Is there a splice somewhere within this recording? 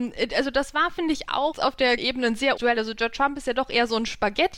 yes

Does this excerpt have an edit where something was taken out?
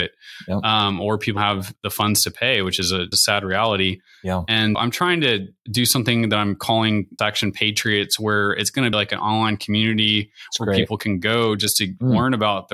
yes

